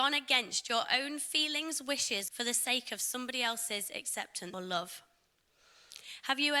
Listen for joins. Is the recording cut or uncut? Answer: cut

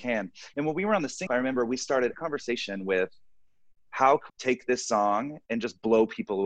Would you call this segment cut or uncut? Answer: cut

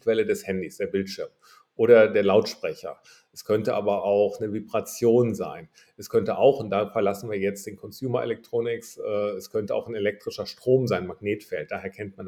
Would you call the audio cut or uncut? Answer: uncut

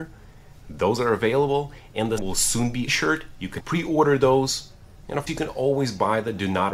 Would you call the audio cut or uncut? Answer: cut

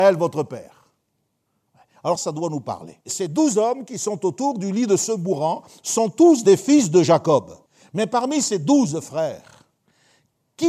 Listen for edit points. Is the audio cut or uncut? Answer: cut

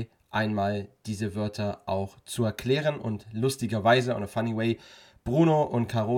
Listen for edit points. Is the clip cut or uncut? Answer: uncut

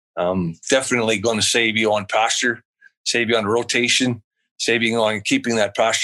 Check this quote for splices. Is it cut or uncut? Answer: uncut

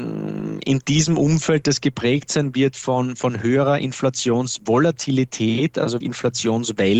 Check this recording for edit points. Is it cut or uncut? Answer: cut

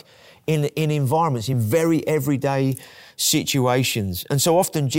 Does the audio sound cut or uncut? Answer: uncut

